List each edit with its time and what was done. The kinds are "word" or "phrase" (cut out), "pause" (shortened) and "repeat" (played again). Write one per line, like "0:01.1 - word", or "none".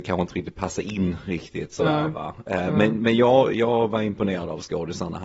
none